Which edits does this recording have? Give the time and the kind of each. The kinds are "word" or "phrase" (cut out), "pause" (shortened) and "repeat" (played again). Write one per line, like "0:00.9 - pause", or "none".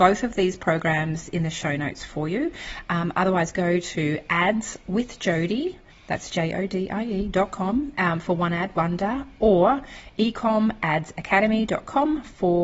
0:05.9 - pause